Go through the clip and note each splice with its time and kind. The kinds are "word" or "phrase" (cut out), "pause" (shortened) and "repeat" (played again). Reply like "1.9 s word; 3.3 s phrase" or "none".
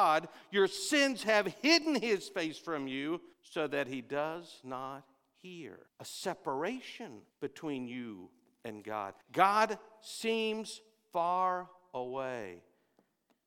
3.3 s pause; 5.9 s pause; 7.3 s pause; 9.2 s pause